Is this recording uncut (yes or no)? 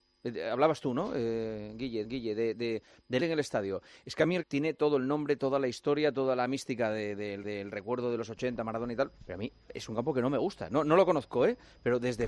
no